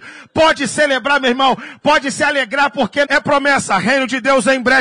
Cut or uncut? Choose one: cut